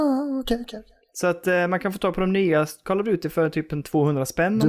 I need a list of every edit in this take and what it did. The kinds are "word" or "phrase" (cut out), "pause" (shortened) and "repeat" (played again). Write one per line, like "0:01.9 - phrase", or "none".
none